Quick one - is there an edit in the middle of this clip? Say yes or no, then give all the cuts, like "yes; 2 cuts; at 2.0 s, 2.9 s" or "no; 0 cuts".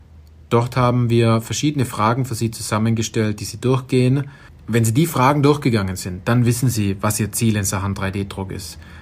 no; 0 cuts